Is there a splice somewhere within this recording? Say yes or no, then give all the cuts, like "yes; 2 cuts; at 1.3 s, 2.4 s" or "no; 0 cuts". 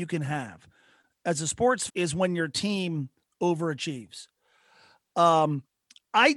yes; 1 cut; at 1.9 s